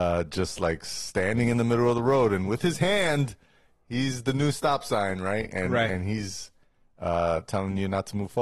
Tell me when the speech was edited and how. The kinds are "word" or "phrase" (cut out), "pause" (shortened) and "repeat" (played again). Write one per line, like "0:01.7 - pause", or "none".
none